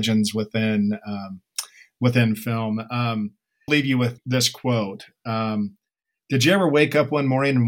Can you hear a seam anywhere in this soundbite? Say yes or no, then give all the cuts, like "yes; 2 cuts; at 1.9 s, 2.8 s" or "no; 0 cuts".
yes; 2 cuts; at 3.7 s, 4.2 s